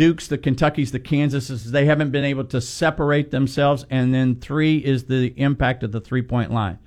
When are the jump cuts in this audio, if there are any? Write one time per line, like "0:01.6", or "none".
none